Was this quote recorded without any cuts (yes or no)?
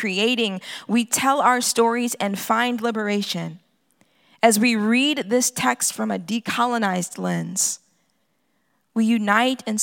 yes